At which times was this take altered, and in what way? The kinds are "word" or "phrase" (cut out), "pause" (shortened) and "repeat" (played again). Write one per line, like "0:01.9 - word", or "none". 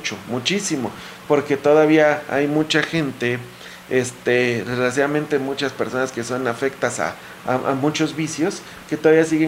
none